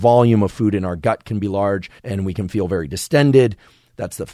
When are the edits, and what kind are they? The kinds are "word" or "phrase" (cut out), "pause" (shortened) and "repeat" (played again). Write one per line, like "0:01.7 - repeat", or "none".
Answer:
0:02.0 - pause